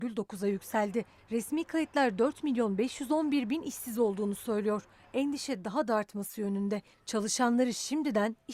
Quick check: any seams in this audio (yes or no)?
no